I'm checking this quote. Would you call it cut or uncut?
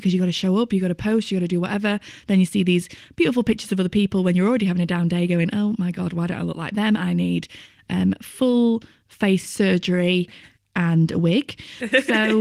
uncut